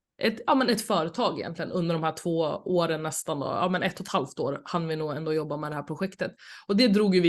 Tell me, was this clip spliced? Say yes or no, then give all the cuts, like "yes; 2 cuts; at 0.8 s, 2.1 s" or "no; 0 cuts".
no; 0 cuts